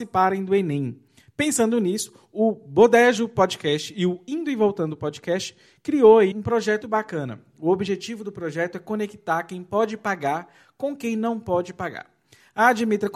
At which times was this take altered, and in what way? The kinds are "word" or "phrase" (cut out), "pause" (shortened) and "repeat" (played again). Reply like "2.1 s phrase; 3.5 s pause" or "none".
6.3 s word; 6.8 s word